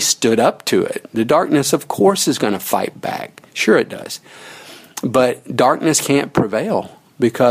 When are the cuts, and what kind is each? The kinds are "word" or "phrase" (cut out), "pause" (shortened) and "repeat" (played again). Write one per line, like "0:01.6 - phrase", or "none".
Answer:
none